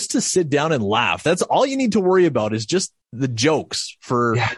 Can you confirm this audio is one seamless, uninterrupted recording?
no; 1 cut; at 3.0 s

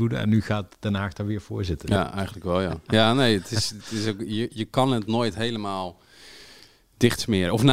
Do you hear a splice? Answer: no; 0 cuts

